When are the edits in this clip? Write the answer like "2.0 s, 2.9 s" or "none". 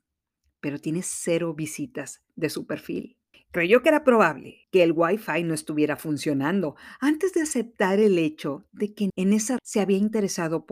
3.3 s, 4.6 s, 9.1 s, 9.6 s